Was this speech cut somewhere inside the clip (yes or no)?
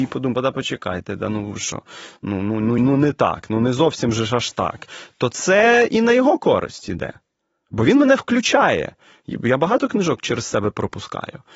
no